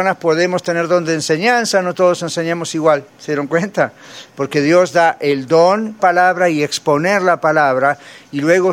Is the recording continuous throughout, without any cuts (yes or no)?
no